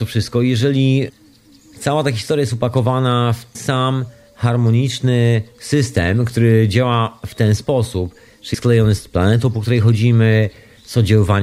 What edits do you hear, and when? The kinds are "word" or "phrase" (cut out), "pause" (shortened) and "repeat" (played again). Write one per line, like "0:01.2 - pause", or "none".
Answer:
0:03.5 - word
0:07.6 - word
0:08.5 - word